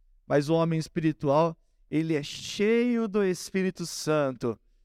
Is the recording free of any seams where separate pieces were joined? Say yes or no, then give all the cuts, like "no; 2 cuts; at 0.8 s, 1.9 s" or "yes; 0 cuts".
yes; 0 cuts